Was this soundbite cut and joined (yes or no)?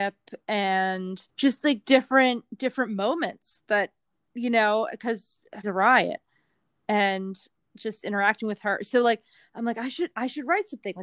yes